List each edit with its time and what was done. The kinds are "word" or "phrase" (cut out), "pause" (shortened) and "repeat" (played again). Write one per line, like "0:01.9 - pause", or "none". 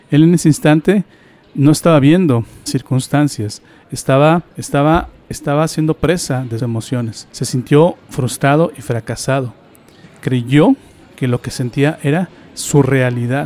0:02.7 - word
0:04.5 - pause
0:06.6 - word
0:07.3 - pause